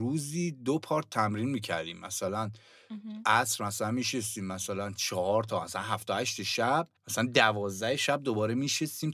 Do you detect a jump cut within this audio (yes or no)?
yes